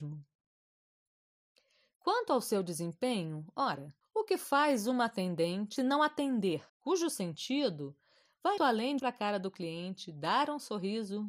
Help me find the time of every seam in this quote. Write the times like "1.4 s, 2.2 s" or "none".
4.0 s, 5.8 s, 6.7 s, 8.6 s, 9.0 s